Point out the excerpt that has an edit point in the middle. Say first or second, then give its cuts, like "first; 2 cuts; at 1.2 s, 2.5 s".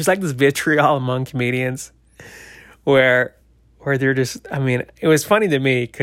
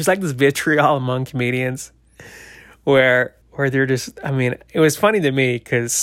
second; 1 cut; at 3.4 s